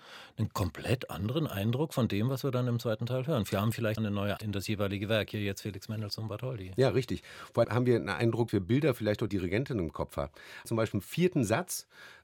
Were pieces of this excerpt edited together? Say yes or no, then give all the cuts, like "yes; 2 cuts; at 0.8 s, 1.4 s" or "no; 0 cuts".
yes; 6 cuts; at 4.0 s, 4.4 s, 7.6 s, 8.5 s, 9.3 s, 10.9 s